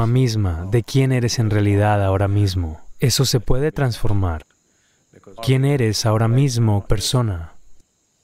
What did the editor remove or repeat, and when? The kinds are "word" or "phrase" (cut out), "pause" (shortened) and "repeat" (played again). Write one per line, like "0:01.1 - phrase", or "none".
0:05.4 - word
0:06.9 - word

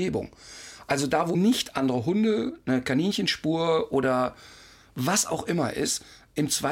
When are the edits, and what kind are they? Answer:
0:01.3 - word

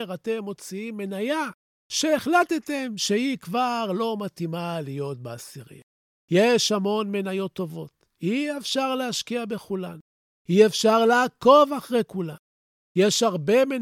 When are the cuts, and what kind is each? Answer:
none

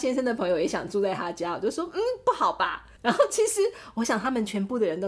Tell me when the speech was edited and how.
0:03.0 - pause

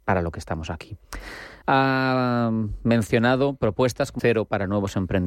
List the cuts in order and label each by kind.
0:01.6 - pause
0:04.2 - word

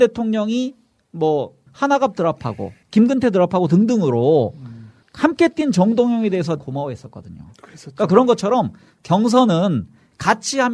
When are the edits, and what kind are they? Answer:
0:01.7 - phrase
0:02.8 - pause
0:06.6 - word

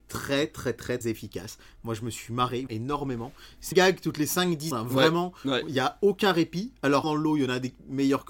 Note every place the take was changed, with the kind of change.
0:01.0 - word
0:02.7 - word
0:03.7 - word
0:04.7 - word
0:07.0 - word

